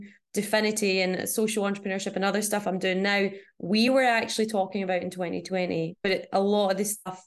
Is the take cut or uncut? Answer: uncut